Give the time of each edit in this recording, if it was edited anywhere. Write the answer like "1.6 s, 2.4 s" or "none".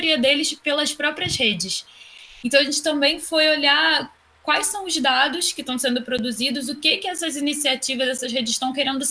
none